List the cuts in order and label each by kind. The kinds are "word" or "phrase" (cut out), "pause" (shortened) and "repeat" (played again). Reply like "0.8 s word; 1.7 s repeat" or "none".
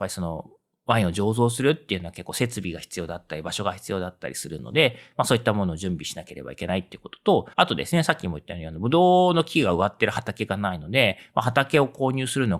7.5 s pause

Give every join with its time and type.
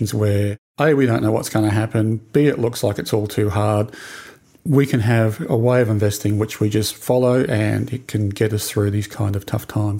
none

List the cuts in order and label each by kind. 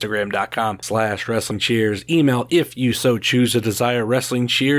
none

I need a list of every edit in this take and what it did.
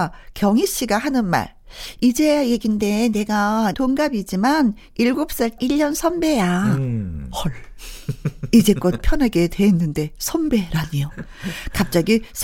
3.7 s word; 5.6 s phrase; 9.0 s word

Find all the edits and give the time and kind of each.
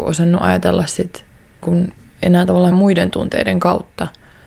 1.6 s word; 2.7 s word

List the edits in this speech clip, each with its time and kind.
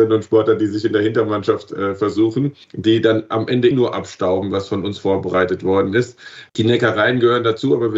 2.6 s pause; 3.7 s word; 6.5 s pause

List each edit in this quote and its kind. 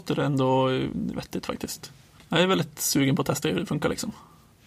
2.2 s pause; 3.4 s word

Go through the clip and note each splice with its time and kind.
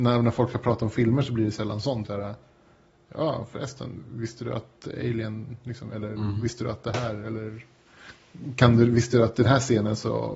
2.0 s phrase

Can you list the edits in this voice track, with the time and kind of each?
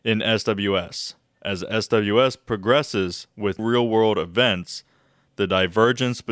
3.6 s word

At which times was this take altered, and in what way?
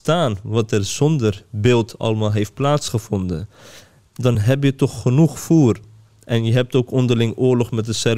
none

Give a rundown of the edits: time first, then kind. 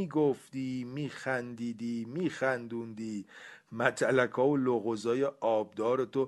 none

